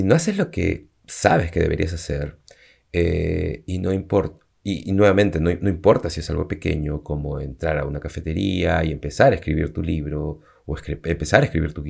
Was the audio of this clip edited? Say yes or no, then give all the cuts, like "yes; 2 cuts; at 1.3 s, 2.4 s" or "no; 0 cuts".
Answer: no; 0 cuts